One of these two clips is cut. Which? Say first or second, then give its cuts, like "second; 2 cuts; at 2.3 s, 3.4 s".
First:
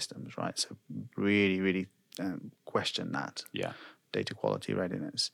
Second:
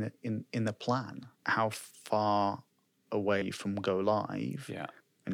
second; 2 cuts; at 1.4 s, 3.4 s